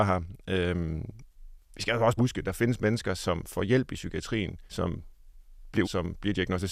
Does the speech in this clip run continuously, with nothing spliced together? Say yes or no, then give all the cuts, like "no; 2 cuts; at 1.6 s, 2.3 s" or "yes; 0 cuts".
no; 3 cuts; at 2.2 s, 4.7 s, 5.8 s